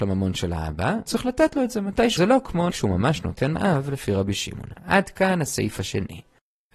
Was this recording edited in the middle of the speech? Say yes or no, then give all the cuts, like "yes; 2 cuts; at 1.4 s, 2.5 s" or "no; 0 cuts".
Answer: yes; 4 cuts; at 1.1 s, 2.2 s, 2.7 s, 3.5 s